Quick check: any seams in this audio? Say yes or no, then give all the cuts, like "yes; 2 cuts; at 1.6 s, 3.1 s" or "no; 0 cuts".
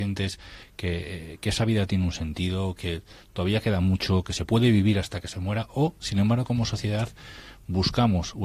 no; 0 cuts